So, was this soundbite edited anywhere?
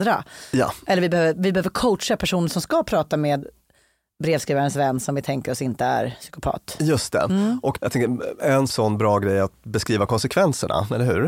no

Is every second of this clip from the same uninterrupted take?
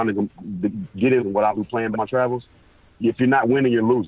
no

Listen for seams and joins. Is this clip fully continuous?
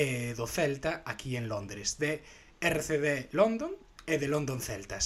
yes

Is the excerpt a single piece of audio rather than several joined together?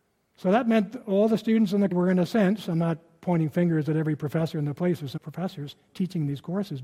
no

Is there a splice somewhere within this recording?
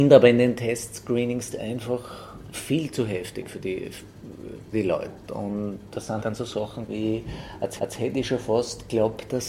yes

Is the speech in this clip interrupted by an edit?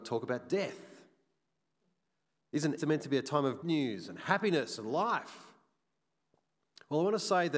yes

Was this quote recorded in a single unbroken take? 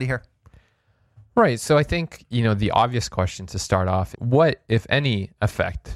no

